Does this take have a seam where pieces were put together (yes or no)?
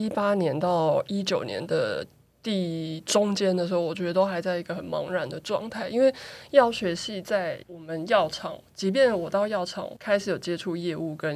yes